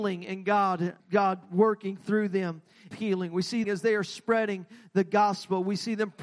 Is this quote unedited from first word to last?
no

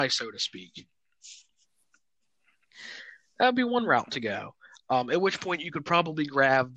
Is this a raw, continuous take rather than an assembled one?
yes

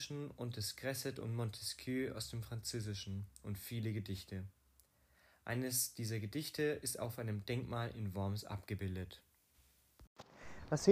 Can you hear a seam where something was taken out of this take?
no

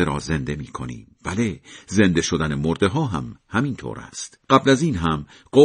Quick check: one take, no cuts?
no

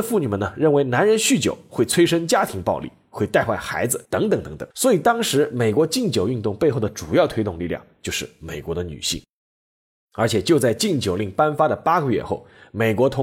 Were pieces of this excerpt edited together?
yes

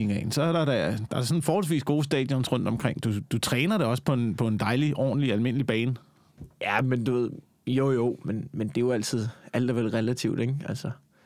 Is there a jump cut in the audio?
no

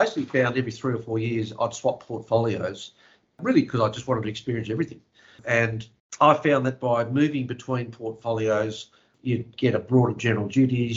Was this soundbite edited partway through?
no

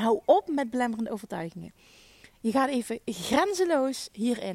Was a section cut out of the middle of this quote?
no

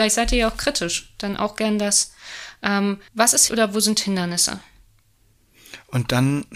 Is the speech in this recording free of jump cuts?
no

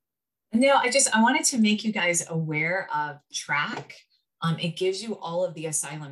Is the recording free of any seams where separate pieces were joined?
yes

